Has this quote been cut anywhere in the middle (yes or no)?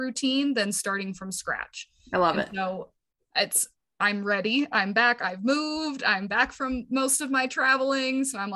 no